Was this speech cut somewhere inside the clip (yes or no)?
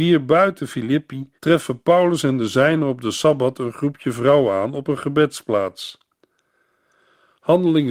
yes